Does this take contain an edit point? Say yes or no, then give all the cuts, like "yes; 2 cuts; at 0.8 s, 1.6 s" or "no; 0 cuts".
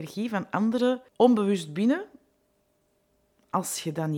yes; 1 cut; at 1.1 s